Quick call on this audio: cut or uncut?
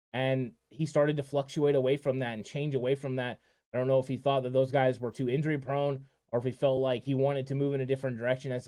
uncut